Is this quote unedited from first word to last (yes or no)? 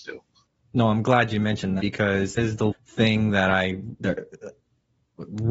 no